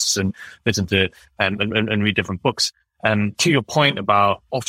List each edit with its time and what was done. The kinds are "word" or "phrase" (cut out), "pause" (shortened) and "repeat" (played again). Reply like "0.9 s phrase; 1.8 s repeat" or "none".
none